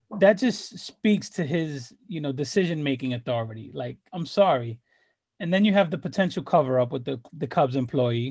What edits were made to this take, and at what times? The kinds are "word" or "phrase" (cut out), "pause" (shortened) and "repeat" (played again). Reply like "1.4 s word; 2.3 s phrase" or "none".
none